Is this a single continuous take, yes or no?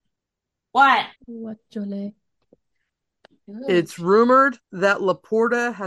no